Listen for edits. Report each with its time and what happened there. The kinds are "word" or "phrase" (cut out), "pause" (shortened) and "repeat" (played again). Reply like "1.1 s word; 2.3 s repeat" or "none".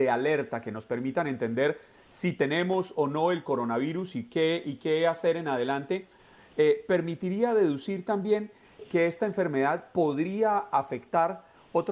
none